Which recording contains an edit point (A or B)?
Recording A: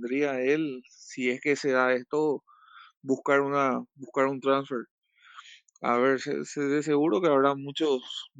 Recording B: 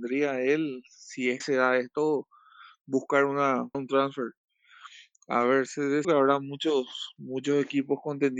B